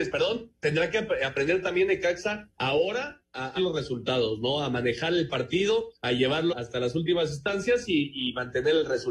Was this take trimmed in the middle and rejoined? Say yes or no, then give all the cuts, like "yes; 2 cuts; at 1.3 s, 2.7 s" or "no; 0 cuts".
yes; 4 cuts; at 2.5 s, 3.6 s, 5.9 s, 6.5 s